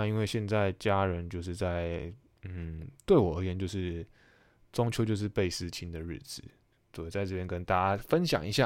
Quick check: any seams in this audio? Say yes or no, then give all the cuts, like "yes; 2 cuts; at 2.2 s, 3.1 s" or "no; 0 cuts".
no; 0 cuts